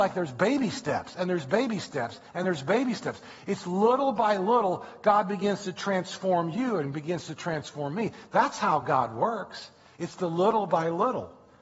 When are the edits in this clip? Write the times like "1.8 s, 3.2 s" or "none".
none